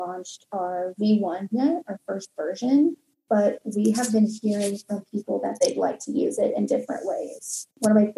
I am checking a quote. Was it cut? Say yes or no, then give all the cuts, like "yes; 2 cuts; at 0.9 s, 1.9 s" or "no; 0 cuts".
no; 0 cuts